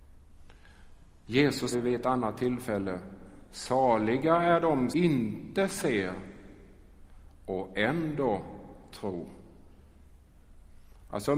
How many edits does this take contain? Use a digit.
2